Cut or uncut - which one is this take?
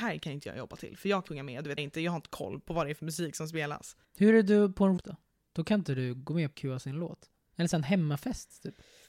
cut